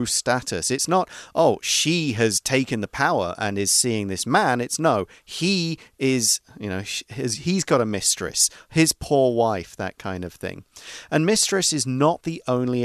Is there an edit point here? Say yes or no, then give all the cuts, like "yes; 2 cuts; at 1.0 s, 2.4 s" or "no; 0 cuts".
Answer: no; 0 cuts